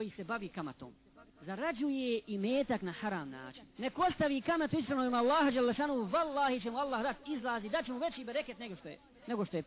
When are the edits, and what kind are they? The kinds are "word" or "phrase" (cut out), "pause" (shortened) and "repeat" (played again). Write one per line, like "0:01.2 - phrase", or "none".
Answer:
0:01.3 - pause
0:03.7 - pause

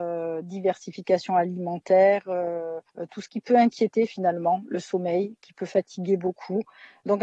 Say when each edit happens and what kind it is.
0:02.9 - pause

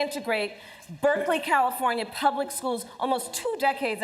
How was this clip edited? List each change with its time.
none

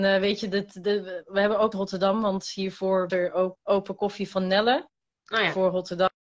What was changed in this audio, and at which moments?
0:01.7 - word
0:03.1 - word
0:03.6 - word

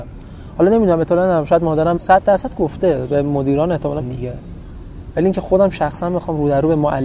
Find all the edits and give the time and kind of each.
0:02.0 - word
0:04.0 - word

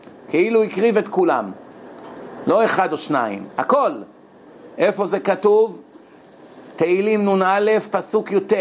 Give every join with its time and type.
0:01.1 - phrase

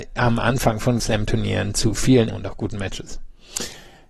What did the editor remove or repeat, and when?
0:01.0 - word
0:02.3 - word

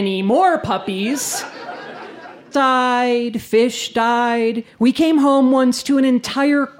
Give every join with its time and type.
0:02.5 - word

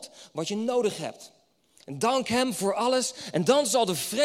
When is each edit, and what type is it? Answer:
none

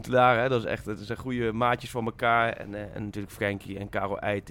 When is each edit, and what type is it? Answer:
0:02.9 - word

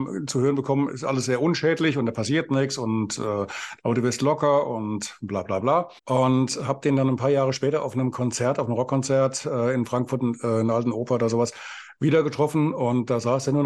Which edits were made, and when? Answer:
0:06.0 - pause

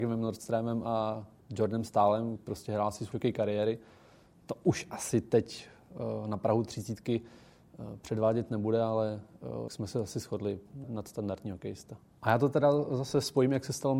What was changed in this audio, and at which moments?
0:02.4 - word
0:03.1 - word
0:09.7 - word
0:10.8 - word

